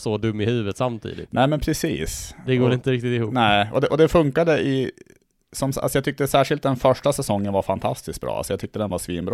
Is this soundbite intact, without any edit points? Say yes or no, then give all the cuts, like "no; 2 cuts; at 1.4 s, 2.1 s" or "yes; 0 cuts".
yes; 0 cuts